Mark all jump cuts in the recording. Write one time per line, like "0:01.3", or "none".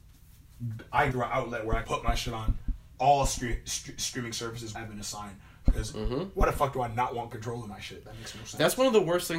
0:01.1
0:01.8
0:04.7